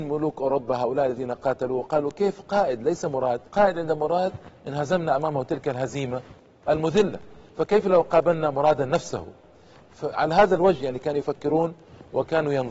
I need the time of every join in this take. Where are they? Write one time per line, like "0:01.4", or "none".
0:03.5